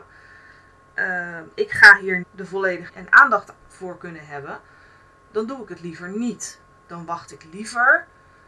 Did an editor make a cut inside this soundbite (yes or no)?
yes